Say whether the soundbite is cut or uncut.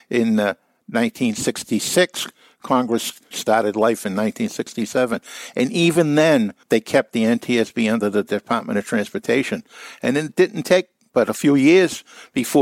cut